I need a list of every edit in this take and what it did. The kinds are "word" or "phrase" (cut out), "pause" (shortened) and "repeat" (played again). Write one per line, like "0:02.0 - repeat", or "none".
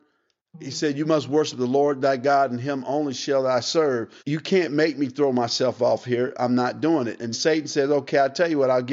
0:04.2 - pause
0:07.3 - word